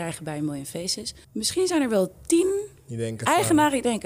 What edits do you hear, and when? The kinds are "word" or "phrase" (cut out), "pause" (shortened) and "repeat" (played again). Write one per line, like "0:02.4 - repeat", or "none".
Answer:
0:01.2 - pause

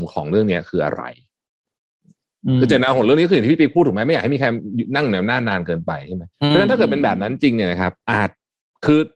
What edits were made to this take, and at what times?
0:06.3 - pause

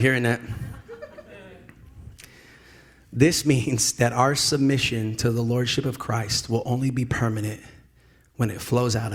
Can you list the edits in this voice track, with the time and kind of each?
none

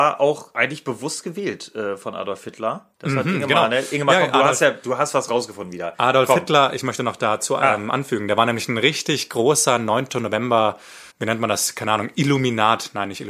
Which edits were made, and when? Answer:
0:02.9 - pause
0:11.1 - pause

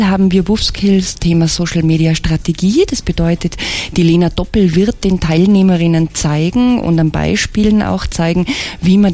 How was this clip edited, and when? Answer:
0:01.1 - word

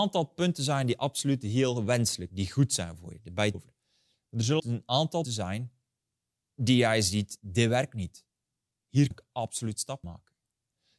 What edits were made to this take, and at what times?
0:02.3 - word
0:03.5 - word
0:04.6 - word
0:05.2 - word
0:09.1 - word
0:10.0 - word

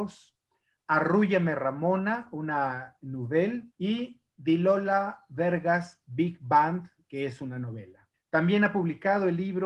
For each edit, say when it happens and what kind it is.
0:03.7 - pause
0:08.1 - pause

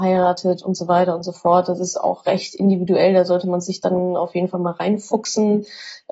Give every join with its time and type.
none

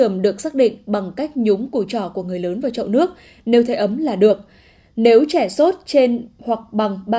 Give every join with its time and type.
none

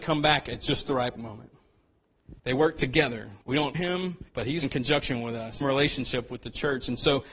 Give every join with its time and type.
0:01.2 - word
0:02.4 - pause
0:03.4 - pause
0:03.7 - word
0:04.3 - pause
0:04.6 - word
0:05.6 - phrase

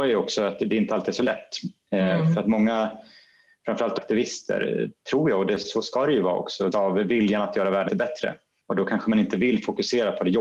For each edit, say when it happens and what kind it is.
0:04.0 - phrase
0:06.7 - word
0:07.9 - word

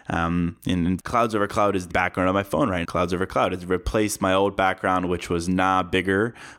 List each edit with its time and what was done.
0:01.0 - word
0:01.9 - word
0:02.8 - word

